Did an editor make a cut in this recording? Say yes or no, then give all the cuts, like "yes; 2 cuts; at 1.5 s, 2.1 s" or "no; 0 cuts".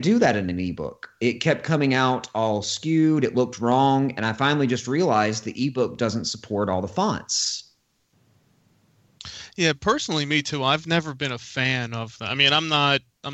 no; 0 cuts